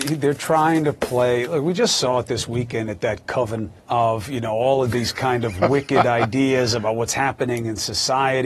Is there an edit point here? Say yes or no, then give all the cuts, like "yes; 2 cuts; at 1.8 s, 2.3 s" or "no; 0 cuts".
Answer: yes; 1 cut; at 3.8 s